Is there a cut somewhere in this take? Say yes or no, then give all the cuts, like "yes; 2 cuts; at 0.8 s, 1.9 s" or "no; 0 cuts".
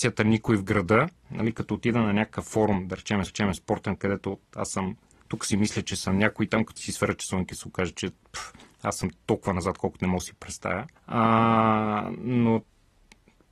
yes; 3 cuts; at 3.3 s, 6.8 s, 11.0 s